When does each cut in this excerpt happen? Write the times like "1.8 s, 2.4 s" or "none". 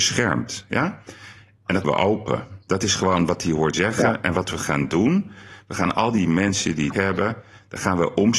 1.8 s, 2.6 s, 3.7 s, 6.9 s